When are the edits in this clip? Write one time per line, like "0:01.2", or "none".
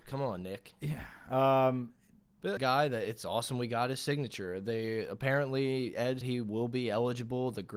0:02.6
0:06.2